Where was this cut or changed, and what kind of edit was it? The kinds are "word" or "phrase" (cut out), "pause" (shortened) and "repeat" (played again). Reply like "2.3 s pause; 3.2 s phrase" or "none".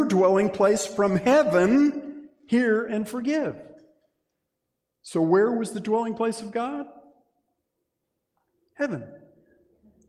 none